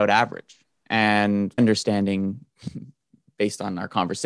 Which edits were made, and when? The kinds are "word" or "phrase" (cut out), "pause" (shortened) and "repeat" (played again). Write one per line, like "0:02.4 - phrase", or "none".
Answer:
0:01.6 - word